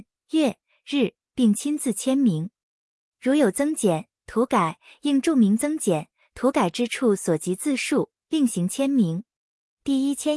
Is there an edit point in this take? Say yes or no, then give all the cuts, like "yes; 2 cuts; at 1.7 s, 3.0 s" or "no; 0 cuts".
no; 0 cuts